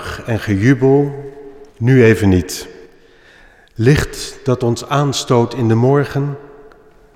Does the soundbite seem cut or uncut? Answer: cut